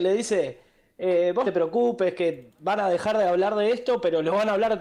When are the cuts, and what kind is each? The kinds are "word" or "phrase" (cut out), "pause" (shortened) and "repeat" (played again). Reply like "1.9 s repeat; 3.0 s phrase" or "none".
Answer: 1.4 s word